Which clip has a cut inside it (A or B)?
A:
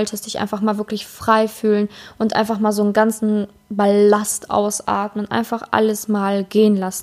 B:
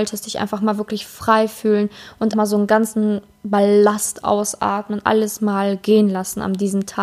B